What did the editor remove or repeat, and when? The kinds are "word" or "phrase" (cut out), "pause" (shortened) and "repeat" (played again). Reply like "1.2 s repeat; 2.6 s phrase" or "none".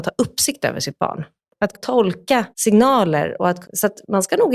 1.7 s word; 2.5 s pause; 3.6 s word